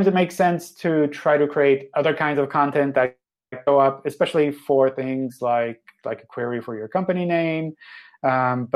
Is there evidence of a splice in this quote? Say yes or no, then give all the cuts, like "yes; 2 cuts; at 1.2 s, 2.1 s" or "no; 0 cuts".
no; 0 cuts